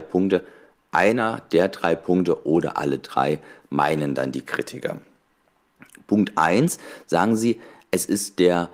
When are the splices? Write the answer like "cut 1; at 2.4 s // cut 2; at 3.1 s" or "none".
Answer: none